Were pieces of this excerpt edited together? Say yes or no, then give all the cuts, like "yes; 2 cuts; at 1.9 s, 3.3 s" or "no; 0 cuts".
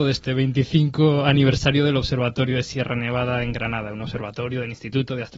no; 0 cuts